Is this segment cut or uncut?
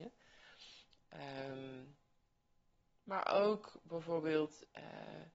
uncut